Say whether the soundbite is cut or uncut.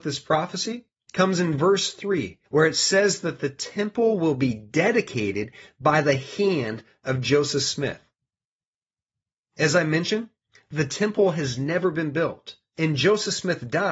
cut